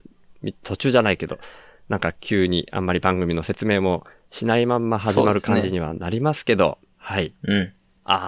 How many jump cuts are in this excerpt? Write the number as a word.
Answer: one